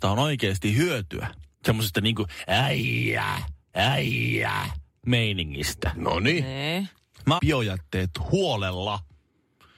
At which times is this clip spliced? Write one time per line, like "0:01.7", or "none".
0:01.5
0:03.7
0:07.4